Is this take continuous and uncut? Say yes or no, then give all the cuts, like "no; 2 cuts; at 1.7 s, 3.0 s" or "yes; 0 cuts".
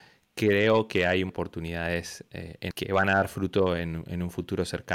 no; 2 cuts; at 1.3 s, 2.7 s